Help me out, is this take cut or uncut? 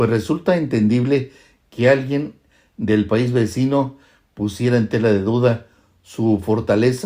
uncut